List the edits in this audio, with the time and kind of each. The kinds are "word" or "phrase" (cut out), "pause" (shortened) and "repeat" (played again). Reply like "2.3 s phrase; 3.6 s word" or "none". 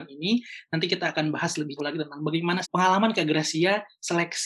1.8 s word; 2.6 s word